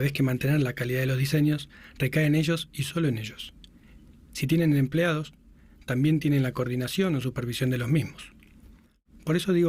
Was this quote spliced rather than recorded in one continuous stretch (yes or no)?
no